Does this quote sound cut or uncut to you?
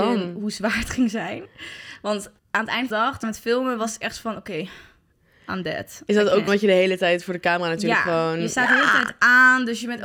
cut